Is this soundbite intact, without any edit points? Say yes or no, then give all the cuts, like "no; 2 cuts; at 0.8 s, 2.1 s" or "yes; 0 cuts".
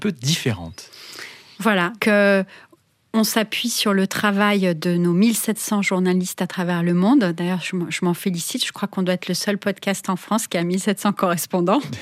no; 1 cut; at 2.0 s